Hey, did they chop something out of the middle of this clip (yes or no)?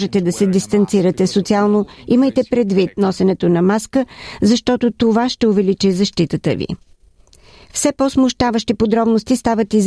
no